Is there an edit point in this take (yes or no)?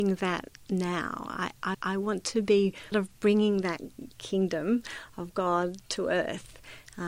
yes